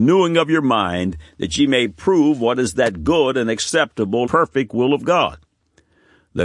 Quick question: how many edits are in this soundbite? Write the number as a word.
one